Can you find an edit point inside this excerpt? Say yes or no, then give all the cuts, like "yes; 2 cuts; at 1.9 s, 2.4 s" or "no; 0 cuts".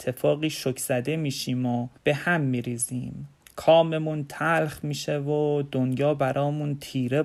yes; 2 cuts; at 2.0 s, 3.4 s